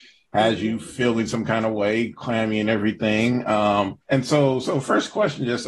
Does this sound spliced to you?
yes; 1 cut; at 4.0 s

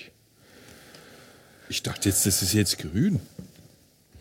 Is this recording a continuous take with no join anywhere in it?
yes; 0 cuts

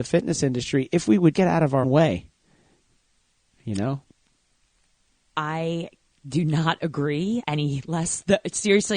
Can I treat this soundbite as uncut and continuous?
no; 3 cuts; at 1.3 s, 1.8 s, 7.4 s

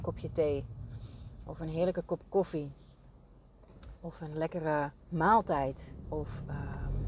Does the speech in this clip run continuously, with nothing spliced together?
no; 1 cut; at 5.0 s

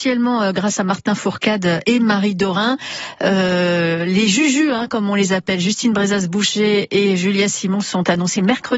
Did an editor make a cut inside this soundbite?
no; 0 cuts

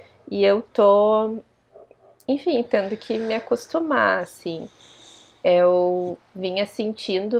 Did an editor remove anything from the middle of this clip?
no; 0 cuts

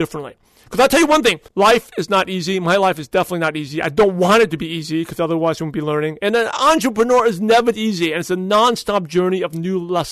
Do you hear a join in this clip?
yes; 1 cut; at 1.5 s

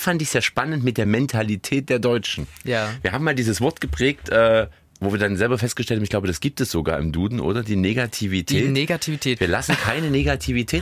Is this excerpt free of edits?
yes; 0 cuts

